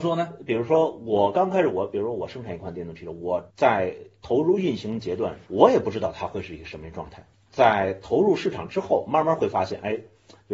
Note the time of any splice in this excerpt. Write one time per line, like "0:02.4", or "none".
0:03.5
0:05.5
0:07.3